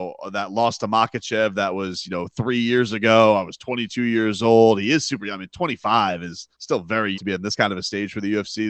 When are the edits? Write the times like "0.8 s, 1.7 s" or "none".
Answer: 6.5 s, 7.1 s